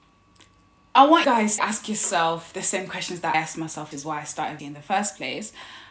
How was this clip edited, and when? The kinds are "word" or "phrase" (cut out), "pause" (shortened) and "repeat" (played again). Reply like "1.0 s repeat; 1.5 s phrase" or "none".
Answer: 1.2 s word; 1.6 s word; 3.3 s word; 3.9 s word; 4.6 s word

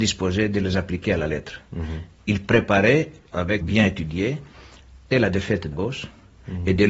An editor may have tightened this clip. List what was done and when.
3.6 s phrase; 5.1 s word; 5.7 s word

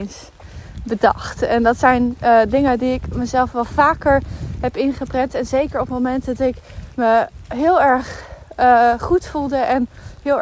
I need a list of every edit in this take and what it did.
6.4 s word

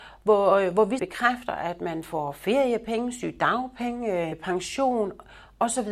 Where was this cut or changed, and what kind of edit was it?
1.0 s word; 4.3 s phrase

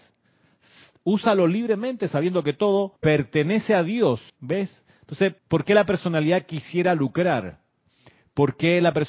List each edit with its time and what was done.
3.0 s pause; 4.3 s pause; 5.4 s pause

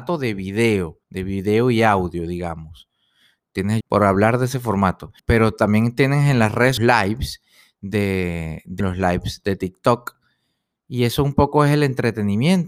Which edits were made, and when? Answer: 1.0 s pause; 3.8 s phrase; 5.2 s pause; 6.8 s phrase; 8.8 s word

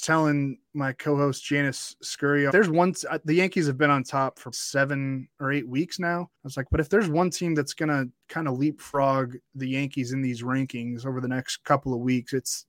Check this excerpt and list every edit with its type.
2.5 s phrase; 4.5 s word; 5.3 s pause; 6.3 s pause

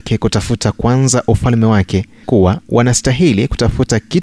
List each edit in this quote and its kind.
2.2 s word

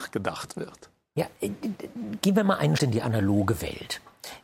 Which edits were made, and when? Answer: 2.8 s word

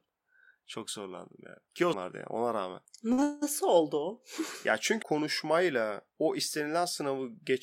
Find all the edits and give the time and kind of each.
1.9 s phrase; 5.0 s word

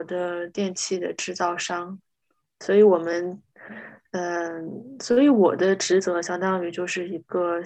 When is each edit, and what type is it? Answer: none

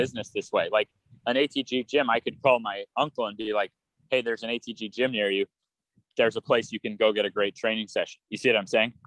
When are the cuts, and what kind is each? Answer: none

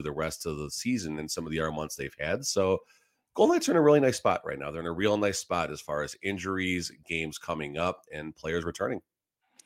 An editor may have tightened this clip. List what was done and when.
none

